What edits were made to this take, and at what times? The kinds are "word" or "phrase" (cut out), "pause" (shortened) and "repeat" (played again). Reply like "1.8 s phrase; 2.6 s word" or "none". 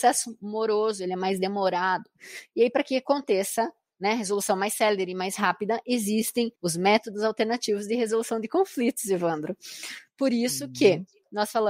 6.5 s pause